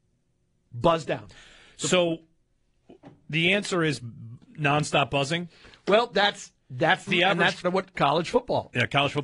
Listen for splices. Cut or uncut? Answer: cut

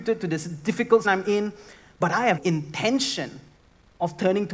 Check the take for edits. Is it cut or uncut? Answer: cut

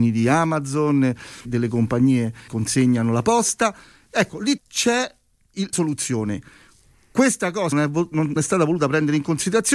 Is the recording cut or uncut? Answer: cut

